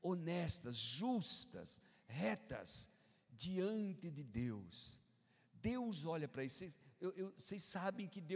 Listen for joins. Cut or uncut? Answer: uncut